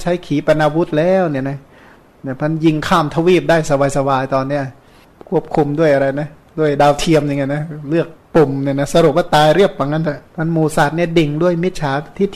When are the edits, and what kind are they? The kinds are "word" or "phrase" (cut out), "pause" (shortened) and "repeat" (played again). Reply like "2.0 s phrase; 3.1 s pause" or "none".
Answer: 8.2 s pause; 10.3 s pause